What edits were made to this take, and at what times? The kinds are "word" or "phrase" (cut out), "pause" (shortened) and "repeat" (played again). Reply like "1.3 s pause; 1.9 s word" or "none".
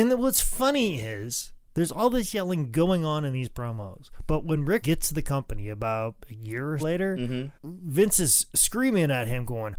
1.6 s pause; 4.8 s word; 6.8 s word; 7.6 s pause